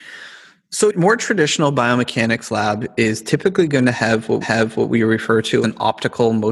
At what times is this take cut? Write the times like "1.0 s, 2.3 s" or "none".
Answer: 0.9 s, 4.4 s, 5.6 s